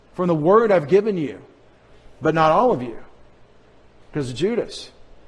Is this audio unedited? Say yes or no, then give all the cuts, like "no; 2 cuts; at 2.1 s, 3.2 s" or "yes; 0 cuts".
yes; 0 cuts